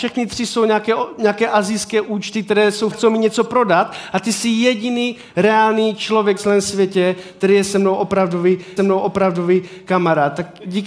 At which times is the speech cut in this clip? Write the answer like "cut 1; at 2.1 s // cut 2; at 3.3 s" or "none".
cut 1; at 2.9 s // cut 2; at 6.4 s // cut 3; at 8.8 s